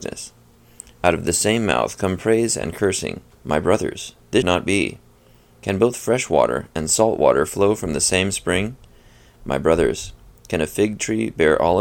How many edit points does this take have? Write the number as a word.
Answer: two